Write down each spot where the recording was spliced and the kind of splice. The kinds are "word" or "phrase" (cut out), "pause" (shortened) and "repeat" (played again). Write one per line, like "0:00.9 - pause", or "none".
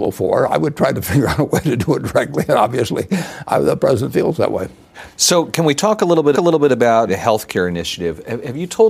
0:06.3 - repeat

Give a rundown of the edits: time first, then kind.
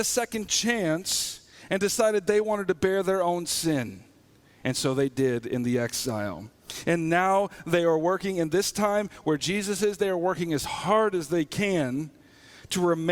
none

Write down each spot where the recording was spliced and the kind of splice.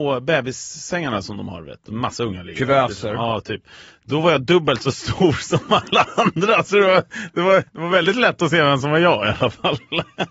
0:07.7 - pause

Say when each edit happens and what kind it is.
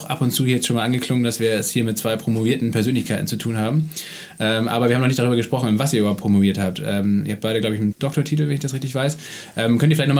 0:07.9 - word

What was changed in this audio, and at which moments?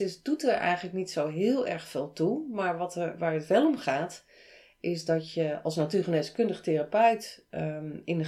none

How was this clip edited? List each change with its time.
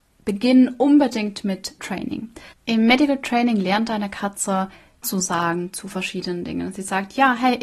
0:01.8 - word
0:02.5 - pause
0:05.0 - word

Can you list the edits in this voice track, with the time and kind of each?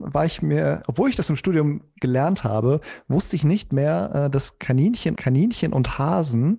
0:05.2 - repeat

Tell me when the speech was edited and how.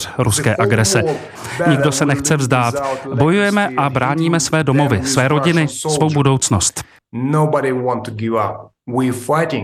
none

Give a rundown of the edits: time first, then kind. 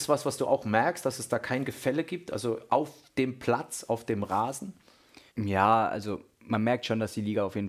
0:05.3 - pause

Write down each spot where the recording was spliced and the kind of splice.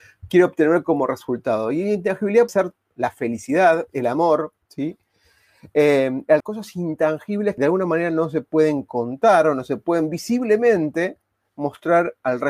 0:02.5 - word
0:04.6 - pause
0:06.4 - phrase
0:07.6 - word

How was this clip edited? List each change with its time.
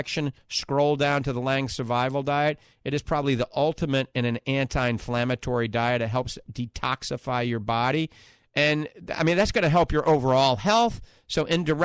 none

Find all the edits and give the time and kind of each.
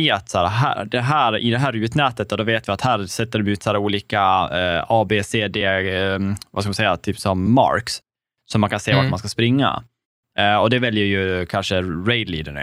none

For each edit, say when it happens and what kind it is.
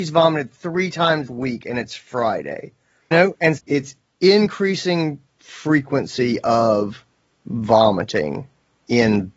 0:01.3 - word
0:03.1 - phrase
0:03.6 - word

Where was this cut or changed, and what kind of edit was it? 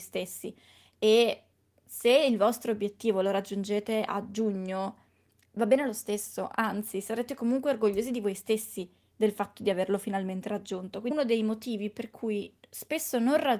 none

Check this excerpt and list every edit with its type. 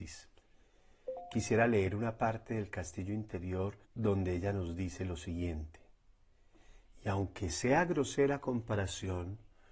0:03.8 - pause

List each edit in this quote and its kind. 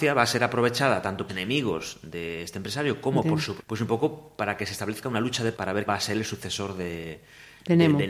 0:01.3 - phrase
0:03.6 - phrase
0:05.5 - word
0:05.9 - word

